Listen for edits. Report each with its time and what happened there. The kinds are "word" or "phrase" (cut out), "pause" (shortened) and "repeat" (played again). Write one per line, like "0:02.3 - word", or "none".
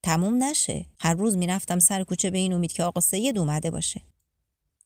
0:00.9 - pause